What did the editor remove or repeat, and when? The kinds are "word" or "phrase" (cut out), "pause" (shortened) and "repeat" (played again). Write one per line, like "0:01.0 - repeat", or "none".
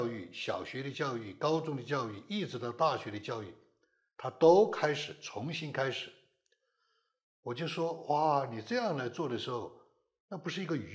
none